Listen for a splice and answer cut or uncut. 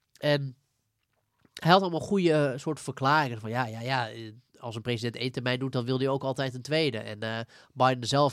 uncut